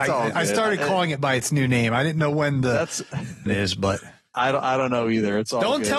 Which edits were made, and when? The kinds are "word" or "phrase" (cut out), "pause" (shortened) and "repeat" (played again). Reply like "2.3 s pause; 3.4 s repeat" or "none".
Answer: 3.5 s word; 4.3 s word